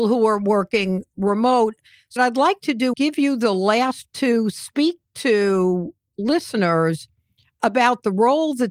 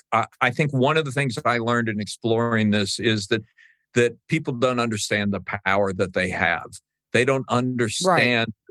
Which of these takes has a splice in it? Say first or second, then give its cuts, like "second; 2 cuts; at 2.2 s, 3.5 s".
first; 4 cuts; at 2.2 s, 2.9 s, 4.0 s, 6.1 s